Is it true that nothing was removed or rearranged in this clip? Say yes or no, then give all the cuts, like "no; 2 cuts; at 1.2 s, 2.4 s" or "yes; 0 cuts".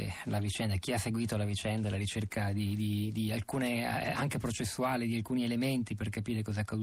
yes; 0 cuts